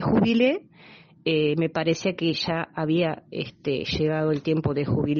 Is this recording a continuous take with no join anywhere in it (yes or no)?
yes